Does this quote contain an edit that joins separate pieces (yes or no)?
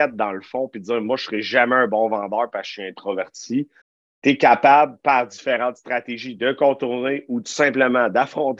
yes